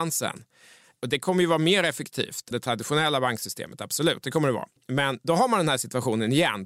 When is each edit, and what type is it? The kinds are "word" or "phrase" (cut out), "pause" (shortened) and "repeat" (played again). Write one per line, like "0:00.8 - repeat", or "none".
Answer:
0:02.5 - word
0:04.8 - pause